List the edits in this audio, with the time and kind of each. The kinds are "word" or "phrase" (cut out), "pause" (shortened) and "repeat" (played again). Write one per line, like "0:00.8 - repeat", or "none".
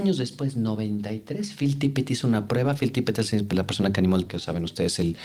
0:04.3 - word